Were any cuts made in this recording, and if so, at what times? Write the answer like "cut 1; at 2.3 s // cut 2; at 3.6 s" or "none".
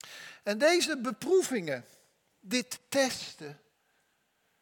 none